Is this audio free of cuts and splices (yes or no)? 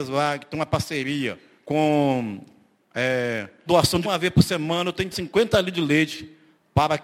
no